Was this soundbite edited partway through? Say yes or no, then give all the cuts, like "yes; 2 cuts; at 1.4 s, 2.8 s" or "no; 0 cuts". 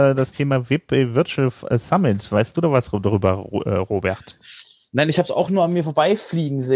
no; 0 cuts